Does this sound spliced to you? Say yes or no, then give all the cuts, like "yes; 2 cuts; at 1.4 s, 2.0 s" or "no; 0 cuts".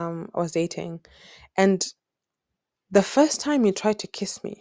no; 0 cuts